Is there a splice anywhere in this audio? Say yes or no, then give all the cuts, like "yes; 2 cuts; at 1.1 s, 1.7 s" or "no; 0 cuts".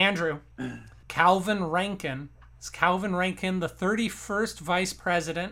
no; 0 cuts